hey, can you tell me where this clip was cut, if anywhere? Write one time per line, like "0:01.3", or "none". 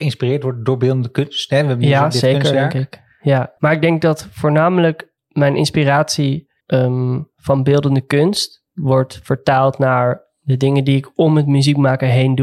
0:03.6
0:05.2
0:06.6
0:08.7